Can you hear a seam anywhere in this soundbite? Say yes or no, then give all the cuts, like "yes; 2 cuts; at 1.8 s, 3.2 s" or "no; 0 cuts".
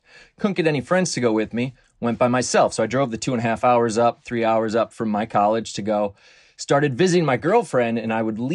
no; 0 cuts